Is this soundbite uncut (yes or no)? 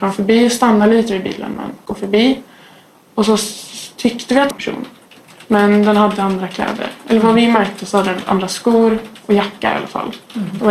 no